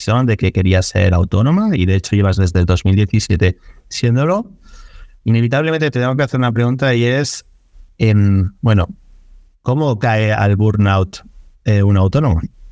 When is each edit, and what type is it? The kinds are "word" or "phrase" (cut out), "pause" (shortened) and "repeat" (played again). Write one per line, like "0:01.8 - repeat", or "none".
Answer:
none